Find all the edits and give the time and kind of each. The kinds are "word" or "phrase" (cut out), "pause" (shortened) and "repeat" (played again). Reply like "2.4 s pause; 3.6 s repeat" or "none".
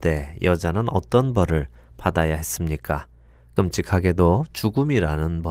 none